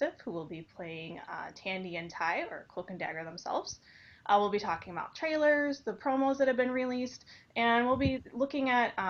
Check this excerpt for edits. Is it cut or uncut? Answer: uncut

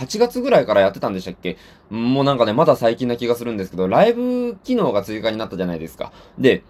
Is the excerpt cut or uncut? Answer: uncut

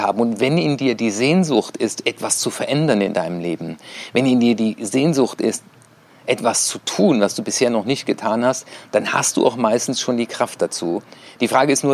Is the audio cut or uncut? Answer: uncut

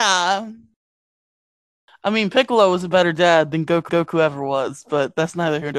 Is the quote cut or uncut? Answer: cut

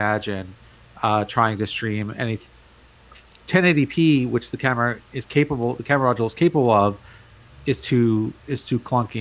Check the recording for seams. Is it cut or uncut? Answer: uncut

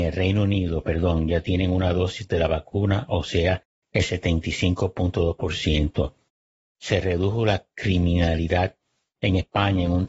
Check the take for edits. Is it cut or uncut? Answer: uncut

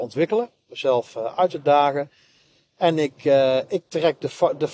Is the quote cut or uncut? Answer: uncut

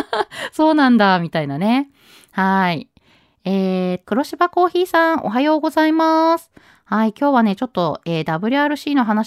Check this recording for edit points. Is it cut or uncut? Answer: cut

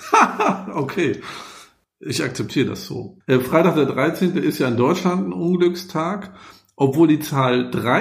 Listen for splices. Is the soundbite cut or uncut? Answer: uncut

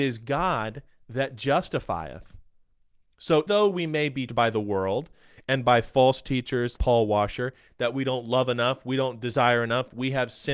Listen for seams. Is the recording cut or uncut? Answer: cut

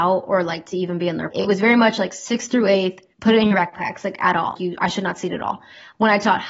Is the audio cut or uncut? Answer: cut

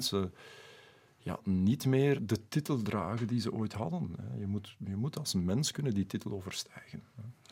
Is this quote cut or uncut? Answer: uncut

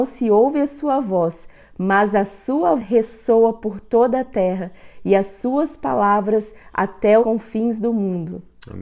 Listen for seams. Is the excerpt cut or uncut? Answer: cut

